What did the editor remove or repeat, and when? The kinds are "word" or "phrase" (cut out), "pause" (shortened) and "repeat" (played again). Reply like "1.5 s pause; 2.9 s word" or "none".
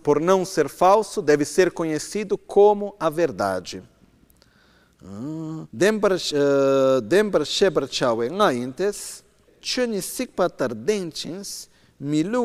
5.7 s pause; 9.5 s word